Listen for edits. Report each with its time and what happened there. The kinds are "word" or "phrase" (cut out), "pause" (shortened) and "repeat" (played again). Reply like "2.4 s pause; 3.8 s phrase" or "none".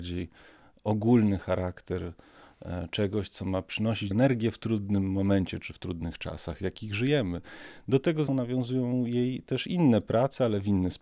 4.1 s word; 8.3 s word